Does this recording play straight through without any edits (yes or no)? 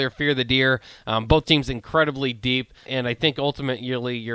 no